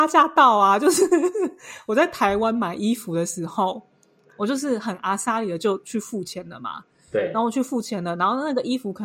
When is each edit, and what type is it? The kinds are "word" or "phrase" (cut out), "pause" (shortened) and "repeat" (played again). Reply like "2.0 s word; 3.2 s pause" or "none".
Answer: none